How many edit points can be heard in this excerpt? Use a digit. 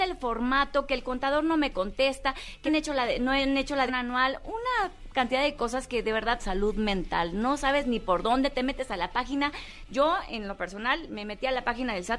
3